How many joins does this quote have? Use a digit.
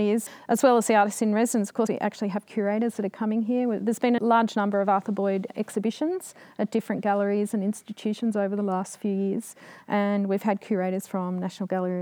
2